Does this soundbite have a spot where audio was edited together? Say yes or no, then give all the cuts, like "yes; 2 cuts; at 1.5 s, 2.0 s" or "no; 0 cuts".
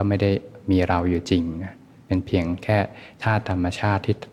no; 0 cuts